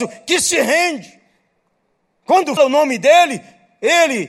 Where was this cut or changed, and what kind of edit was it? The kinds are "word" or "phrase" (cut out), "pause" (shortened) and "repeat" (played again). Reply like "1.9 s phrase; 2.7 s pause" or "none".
2.6 s word